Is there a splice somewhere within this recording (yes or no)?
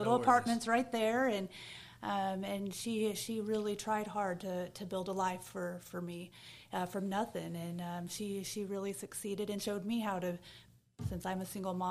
no